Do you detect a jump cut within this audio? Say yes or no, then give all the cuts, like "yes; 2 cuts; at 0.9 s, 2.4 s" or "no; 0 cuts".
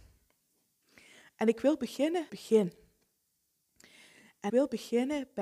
yes; 2 cuts; at 2.3 s, 4.5 s